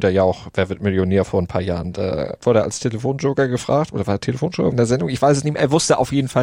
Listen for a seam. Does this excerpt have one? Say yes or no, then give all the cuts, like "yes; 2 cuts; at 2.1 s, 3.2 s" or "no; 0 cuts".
yes; 1 cut; at 4.7 s